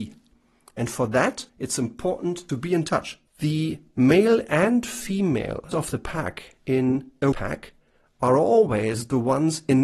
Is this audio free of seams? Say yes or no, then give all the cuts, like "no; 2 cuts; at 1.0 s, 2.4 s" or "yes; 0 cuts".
no; 5 cuts; at 1.5 s, 2.5 s, 3.3 s, 5.7 s, 7.3 s